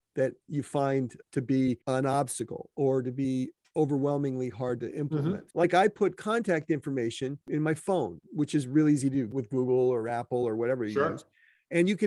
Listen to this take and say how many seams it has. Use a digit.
3